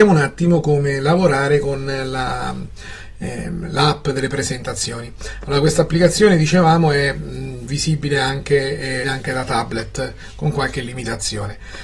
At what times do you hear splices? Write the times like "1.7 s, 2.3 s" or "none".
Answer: 9.0 s

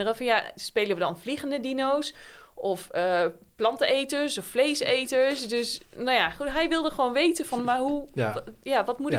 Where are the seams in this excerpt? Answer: none

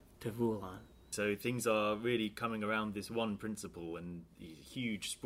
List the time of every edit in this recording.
none

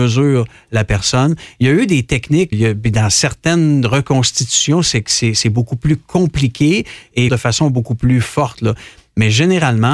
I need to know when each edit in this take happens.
2.5 s, 7.3 s

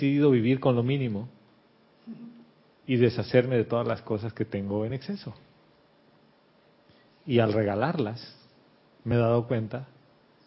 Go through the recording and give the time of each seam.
none

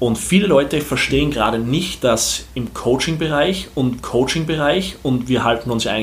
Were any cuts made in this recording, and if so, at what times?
4.0 s

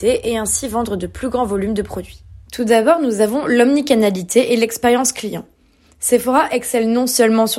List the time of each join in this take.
2.4 s

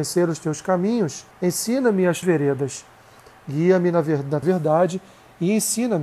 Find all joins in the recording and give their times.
1.3 s, 2.2 s, 4.4 s

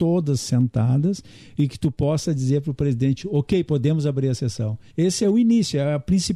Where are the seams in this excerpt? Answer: 3.7 s, 4.9 s, 5.2 s

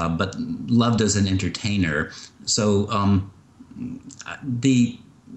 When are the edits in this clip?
none

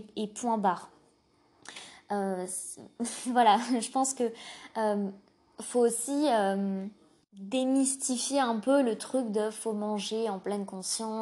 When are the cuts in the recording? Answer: none

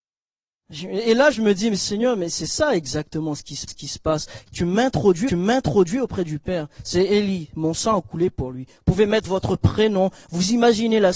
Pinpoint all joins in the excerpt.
3.7 s, 5.3 s

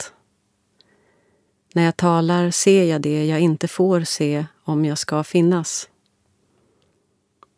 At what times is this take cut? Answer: none

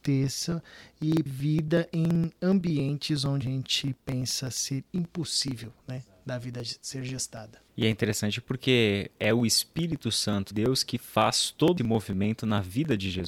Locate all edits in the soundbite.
1.3 s, 3.4 s, 10.5 s, 11.8 s

